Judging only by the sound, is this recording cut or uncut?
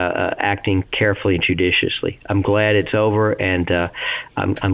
uncut